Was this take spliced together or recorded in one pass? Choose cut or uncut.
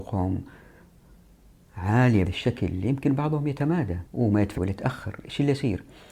cut